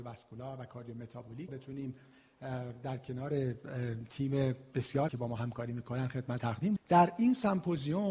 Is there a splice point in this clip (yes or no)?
yes